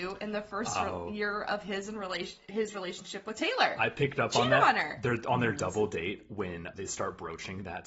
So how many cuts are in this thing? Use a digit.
1